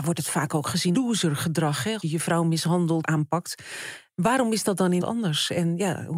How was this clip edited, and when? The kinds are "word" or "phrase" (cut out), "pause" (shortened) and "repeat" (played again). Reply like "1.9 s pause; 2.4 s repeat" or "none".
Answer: 0.9 s word; 2.0 s word; 3.0 s word; 5.0 s word